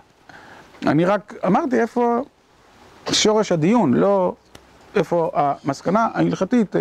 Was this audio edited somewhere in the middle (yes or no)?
no